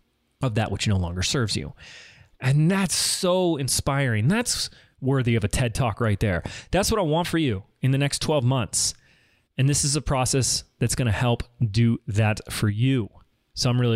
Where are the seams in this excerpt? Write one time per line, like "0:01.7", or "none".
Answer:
none